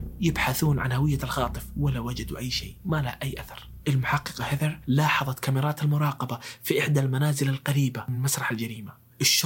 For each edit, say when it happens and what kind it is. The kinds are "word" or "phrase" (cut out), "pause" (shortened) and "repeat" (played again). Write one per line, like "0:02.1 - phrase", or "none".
none